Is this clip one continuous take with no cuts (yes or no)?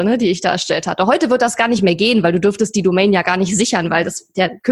yes